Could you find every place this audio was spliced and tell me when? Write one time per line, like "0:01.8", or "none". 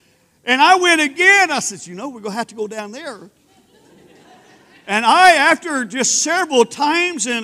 none